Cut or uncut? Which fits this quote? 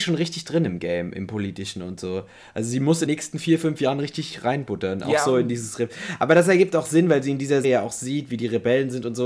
cut